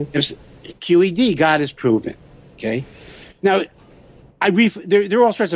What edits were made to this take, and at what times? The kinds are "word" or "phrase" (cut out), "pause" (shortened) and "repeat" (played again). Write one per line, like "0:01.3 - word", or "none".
none